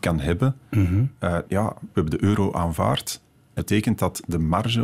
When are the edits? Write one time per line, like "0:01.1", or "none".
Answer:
0:01.4
0:01.9
0:03.6